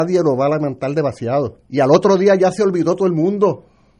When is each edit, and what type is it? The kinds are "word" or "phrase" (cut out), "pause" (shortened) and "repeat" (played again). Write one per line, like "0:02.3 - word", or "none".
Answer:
0:01.6 - pause

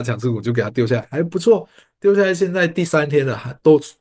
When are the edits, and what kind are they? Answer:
none

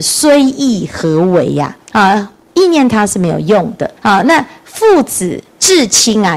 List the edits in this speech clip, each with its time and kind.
0:01.8 - pause
0:04.0 - pause
0:05.5 - pause

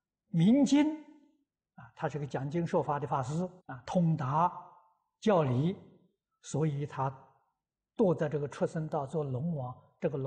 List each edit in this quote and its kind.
0:03.6 - pause

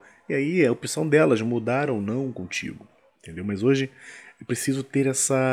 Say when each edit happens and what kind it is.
none

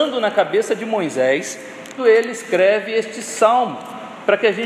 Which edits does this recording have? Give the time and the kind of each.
0:02.0 - word

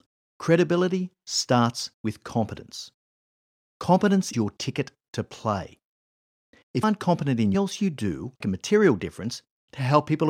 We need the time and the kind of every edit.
0:01.9 - pause
0:04.3 - word
0:06.8 - word
0:07.5 - phrase
0:08.4 - phrase

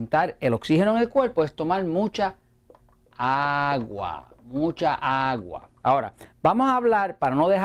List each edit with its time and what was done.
none

